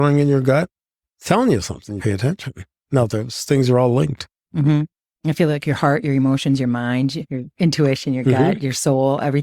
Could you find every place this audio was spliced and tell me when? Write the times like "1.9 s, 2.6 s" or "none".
2.0 s